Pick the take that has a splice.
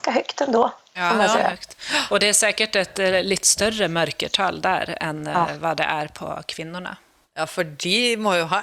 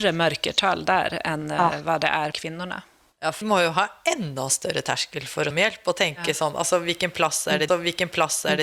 second; 4 cuts; at 2.3 s, 3.4 s, 5.5 s, 7.7 s

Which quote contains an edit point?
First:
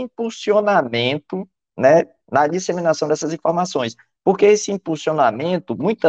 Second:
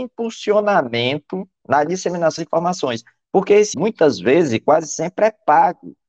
second; 3 cuts; at 1.6 s, 2.4 s, 3.7 s

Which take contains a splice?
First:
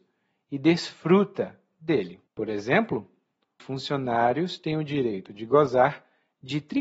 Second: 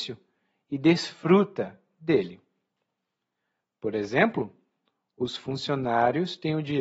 first; 2 cuts; at 2.3 s, 3.6 s

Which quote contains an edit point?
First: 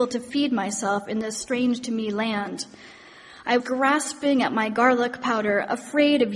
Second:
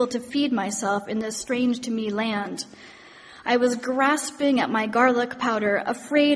first; 1 cut; at 3.6 s

